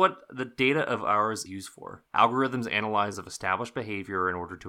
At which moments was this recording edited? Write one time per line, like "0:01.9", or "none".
0:01.5
0:02.1
0:03.1